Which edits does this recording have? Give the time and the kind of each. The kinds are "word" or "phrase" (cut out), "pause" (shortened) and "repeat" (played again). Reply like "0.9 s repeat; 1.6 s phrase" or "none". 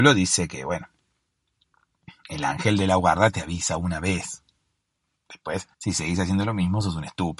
5.7 s pause